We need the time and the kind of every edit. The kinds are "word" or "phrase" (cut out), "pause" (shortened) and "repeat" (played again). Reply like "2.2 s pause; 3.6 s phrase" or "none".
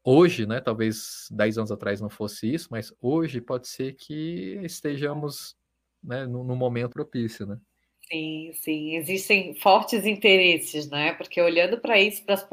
6.9 s word